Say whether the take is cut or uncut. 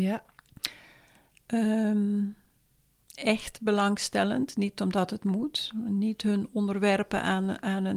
uncut